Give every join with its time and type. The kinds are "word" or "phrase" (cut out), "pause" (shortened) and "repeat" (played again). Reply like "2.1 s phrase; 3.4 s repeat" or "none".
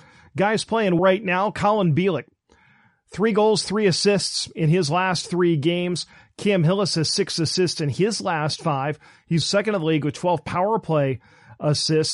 1.0 s word; 9.4 s word